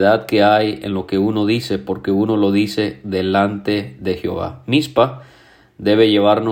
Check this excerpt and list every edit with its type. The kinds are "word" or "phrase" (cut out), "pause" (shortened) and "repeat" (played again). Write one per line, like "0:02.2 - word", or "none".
none